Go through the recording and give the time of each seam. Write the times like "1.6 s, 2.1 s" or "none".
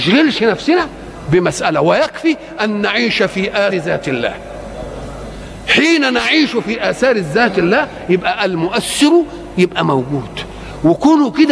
3.7 s